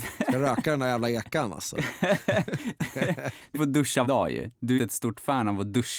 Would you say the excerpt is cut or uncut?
cut